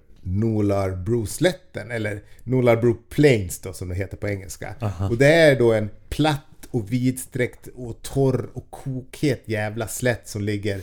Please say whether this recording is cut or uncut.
uncut